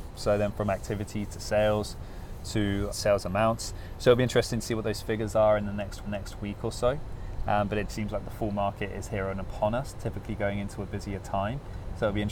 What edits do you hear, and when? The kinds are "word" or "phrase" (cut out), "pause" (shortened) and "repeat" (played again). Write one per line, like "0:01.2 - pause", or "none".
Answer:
0:02.9 - phrase
0:06.0 - repeat
0:07.9 - word